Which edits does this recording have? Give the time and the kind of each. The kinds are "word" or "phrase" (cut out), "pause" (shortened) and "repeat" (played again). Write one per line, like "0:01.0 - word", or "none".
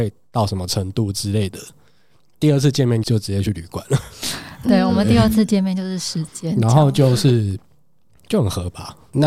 none